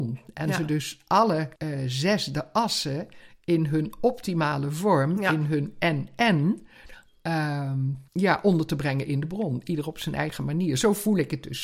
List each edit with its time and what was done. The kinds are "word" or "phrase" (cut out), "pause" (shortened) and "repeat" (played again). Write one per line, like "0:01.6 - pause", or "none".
0:01.6 - pause
0:08.1 - pause

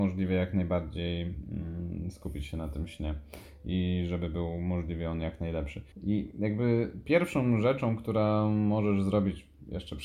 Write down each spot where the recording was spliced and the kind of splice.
0:05.9 - pause

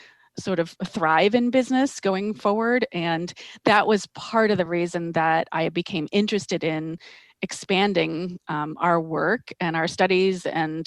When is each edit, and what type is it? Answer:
none

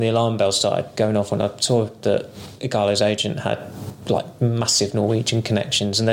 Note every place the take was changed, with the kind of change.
none

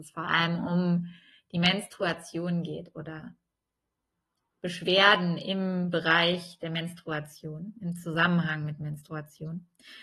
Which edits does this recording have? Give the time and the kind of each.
none

